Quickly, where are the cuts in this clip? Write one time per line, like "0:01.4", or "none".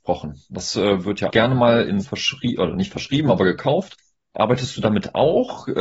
0:01.3
0:02.0